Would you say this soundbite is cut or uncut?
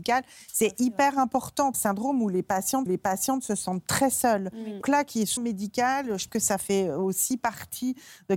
cut